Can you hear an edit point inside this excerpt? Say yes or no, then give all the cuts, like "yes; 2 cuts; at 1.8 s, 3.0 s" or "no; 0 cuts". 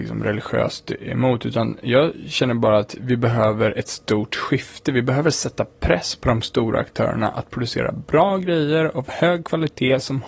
no; 0 cuts